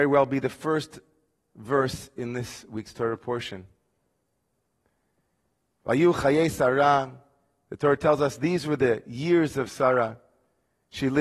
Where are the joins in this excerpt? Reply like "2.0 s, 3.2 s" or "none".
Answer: none